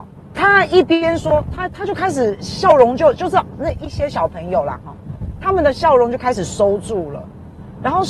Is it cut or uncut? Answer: uncut